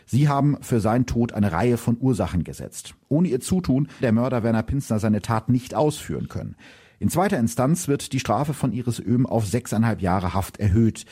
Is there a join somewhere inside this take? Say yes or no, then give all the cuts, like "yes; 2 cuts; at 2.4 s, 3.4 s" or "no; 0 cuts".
yes; 1 cut; at 4.0 s